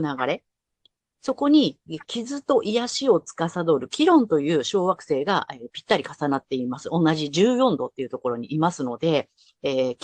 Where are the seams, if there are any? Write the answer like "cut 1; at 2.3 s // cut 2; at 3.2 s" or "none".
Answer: cut 1; at 5.7 s